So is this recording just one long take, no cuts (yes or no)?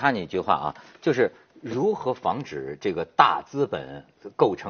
yes